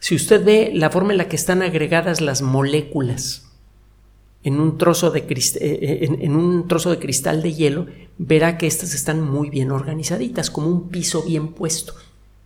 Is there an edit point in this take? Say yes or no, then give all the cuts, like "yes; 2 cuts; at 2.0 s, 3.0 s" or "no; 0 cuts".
no; 0 cuts